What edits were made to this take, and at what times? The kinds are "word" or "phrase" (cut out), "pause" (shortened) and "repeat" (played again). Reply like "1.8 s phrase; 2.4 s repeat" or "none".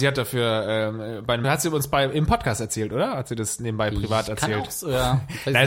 1.4 s word